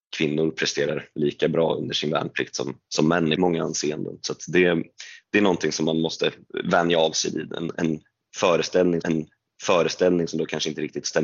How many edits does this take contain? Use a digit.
3